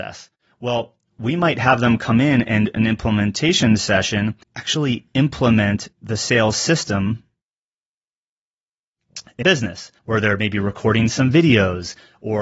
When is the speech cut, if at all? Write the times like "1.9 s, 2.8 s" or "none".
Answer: 2.7 s, 4.4 s, 5.9 s, 9.4 s, 10.0 s